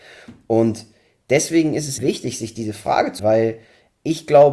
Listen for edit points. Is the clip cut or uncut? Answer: cut